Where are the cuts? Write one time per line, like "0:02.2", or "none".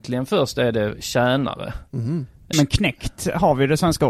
0:02.5